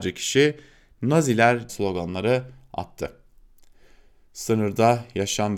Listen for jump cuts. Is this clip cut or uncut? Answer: cut